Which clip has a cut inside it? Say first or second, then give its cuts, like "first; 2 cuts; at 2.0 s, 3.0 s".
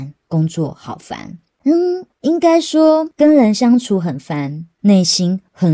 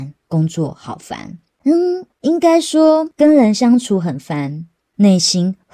first; 1 cut; at 4.7 s